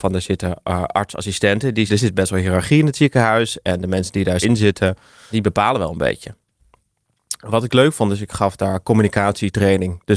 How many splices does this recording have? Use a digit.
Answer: 3